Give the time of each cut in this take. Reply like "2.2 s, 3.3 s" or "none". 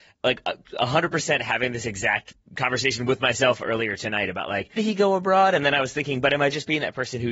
4.8 s